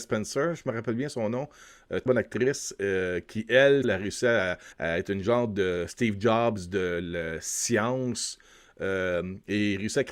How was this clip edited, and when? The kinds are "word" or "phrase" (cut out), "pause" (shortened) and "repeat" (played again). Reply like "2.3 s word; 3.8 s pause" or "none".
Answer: 2.1 s word; 3.8 s phrase; 4.7 s pause